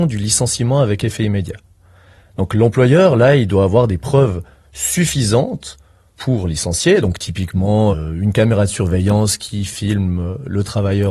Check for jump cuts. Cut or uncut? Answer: uncut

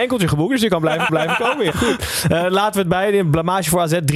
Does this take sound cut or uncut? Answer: cut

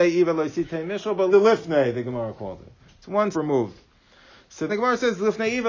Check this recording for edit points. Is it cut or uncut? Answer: cut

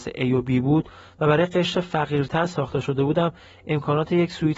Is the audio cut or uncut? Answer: uncut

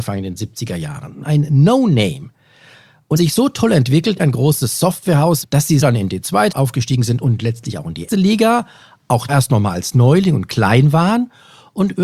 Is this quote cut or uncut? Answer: cut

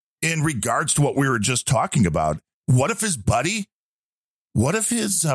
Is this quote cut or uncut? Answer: cut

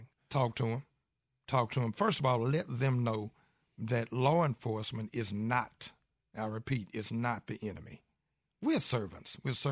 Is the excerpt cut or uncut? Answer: uncut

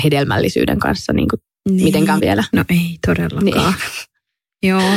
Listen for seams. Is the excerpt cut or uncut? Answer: cut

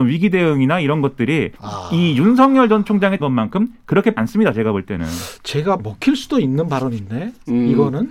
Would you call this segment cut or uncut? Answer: cut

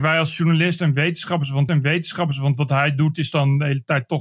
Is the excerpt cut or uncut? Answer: cut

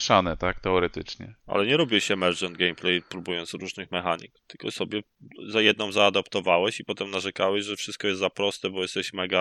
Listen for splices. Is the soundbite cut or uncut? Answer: cut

